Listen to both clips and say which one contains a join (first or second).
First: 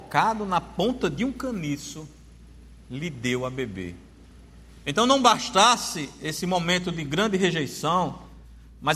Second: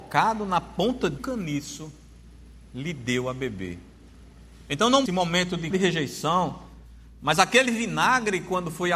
second